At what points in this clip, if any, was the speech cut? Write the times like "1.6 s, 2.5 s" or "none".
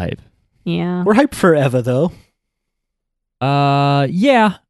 none